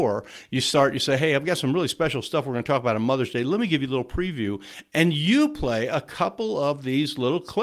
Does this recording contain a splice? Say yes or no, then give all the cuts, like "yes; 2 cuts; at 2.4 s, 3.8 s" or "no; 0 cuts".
no; 0 cuts